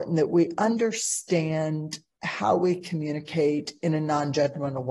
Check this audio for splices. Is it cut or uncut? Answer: uncut